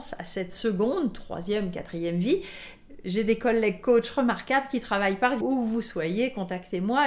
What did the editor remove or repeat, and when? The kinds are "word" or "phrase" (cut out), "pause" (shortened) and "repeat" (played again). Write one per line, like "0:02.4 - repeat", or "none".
0:05.4 - word